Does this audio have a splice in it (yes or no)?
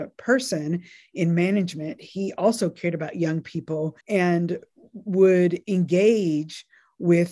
yes